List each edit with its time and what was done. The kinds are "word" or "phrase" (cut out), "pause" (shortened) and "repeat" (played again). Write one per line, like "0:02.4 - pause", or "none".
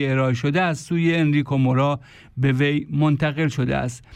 none